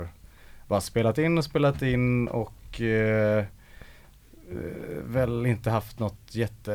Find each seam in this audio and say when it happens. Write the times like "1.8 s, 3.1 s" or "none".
none